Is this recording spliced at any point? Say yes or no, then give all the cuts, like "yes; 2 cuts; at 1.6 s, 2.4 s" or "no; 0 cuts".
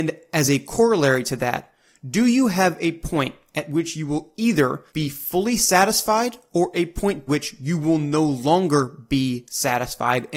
yes; 2 cuts; at 4.9 s, 7.3 s